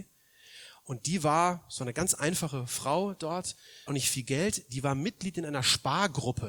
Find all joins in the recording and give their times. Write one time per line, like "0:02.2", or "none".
0:03.9